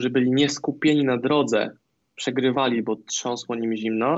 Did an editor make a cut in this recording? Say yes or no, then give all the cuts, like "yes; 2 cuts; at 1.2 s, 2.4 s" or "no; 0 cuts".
no; 0 cuts